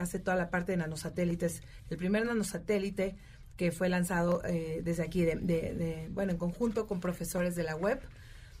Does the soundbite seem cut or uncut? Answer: uncut